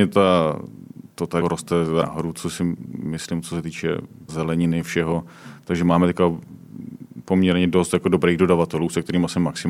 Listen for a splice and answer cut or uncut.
cut